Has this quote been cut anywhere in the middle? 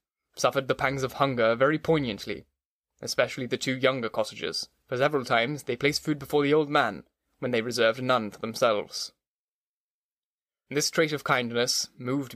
no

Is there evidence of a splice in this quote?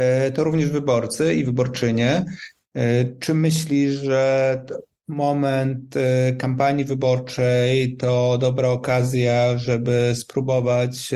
no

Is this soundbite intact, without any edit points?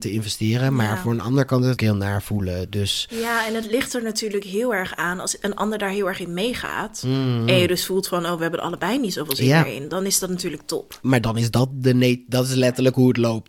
no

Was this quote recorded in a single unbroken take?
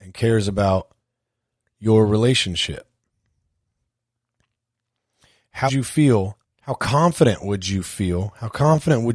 no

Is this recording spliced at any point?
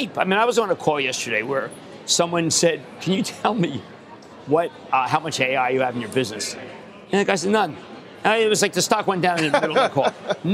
no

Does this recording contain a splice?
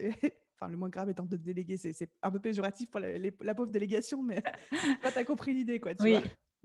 no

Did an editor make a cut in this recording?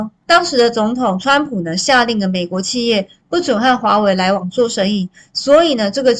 no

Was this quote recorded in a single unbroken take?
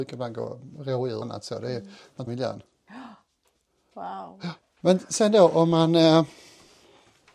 no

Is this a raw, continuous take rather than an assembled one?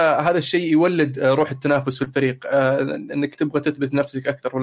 yes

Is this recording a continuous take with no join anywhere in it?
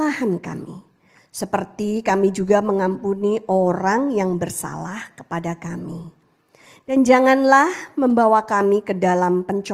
yes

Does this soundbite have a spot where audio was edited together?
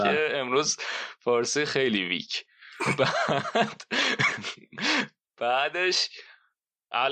no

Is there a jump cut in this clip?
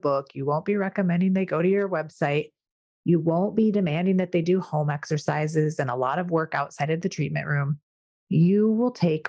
no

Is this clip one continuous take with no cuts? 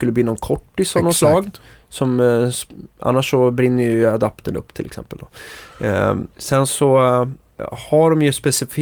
no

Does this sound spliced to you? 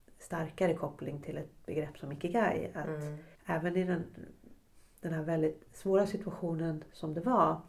yes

